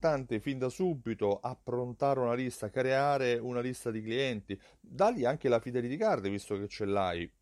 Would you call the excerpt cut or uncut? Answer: uncut